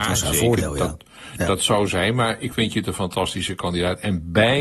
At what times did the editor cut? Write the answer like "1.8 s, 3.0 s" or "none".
1.9 s, 2.5 s